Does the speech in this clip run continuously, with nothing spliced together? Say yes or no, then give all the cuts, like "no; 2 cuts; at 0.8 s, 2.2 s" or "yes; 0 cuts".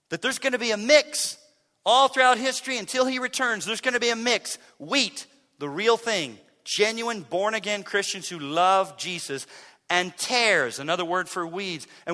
yes; 0 cuts